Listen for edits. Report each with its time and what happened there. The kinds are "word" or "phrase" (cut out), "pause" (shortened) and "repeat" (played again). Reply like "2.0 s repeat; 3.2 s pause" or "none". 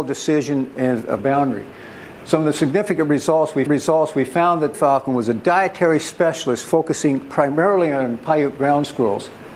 1.2 s phrase; 3.7 s repeat; 4.7 s phrase